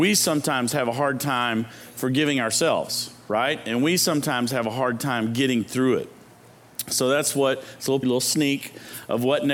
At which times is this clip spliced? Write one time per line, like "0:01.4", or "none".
0:08.0